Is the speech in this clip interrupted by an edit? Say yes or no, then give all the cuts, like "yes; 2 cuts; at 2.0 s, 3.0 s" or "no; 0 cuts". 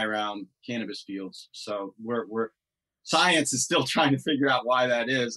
no; 0 cuts